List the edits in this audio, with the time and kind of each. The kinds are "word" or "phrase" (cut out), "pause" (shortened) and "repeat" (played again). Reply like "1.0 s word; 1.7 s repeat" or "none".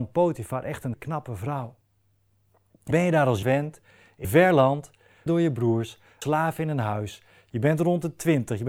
0.9 s word; 2.9 s word; 3.4 s word; 4.2 s word; 5.3 s word; 6.2 s word

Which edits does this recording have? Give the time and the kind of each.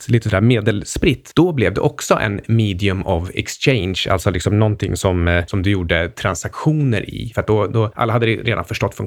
none

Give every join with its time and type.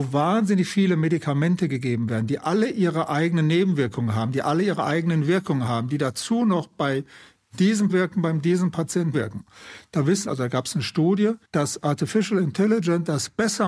7.9 s phrase; 9.1 s word; 10.3 s phrase; 11.4 s pause

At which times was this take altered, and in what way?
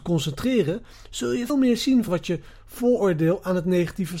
1.5 s word; 2.1 s word

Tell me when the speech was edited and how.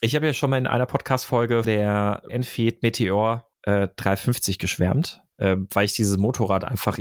1.6 s word; 2.3 s word; 3.5 s pause; 5.3 s pause

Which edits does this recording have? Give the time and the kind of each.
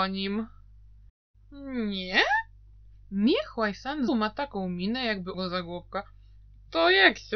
4.1 s word; 5.3 s word

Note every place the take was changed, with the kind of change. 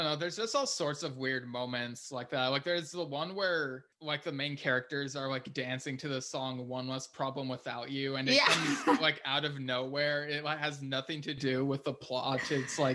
3.9 s pause

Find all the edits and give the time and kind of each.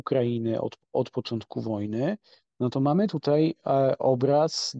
none

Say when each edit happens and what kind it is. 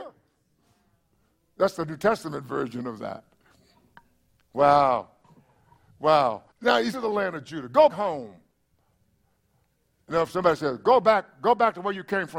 6.5 s pause; 6.9 s phrase; 7.9 s word

